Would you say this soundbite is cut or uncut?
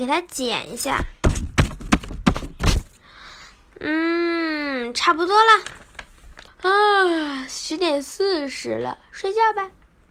cut